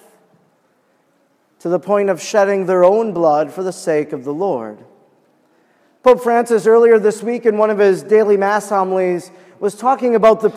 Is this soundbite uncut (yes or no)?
yes